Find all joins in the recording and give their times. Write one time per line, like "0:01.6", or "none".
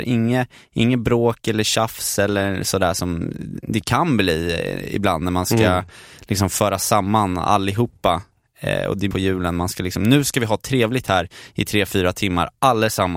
0:09.1